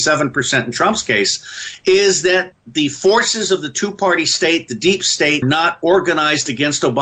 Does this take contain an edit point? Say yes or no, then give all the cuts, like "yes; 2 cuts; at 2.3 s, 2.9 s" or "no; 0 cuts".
yes; 2 cuts; at 2.5 s, 5.4 s